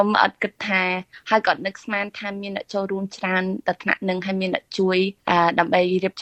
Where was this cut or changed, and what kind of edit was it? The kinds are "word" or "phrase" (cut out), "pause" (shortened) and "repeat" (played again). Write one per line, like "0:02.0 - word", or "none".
0:05.2 - pause